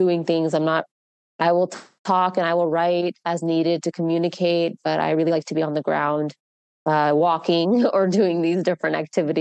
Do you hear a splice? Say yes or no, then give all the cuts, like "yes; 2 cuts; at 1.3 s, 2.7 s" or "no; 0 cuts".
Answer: no; 0 cuts